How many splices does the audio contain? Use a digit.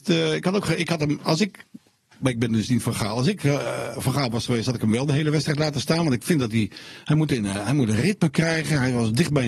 0